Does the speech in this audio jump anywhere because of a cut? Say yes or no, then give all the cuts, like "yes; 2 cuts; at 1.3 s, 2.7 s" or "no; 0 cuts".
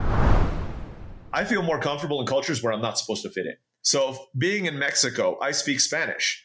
yes; 1 cut; at 3.7 s